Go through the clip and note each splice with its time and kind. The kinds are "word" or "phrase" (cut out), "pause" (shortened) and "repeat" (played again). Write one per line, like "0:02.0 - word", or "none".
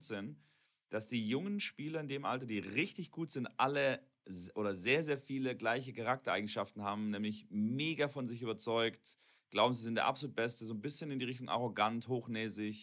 none